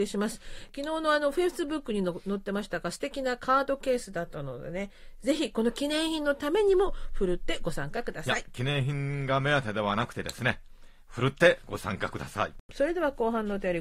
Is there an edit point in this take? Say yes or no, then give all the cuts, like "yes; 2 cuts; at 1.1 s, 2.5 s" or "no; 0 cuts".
yes; 1 cut; at 12.6 s